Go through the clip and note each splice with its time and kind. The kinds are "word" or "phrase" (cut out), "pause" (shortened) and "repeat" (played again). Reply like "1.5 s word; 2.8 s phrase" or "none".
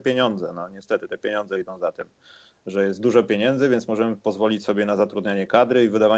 none